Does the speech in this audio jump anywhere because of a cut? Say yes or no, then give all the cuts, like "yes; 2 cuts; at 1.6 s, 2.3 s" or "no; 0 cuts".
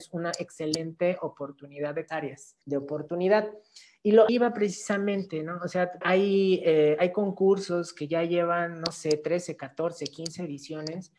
yes; 4 cuts; at 2.1 s, 2.6 s, 4.3 s, 6.0 s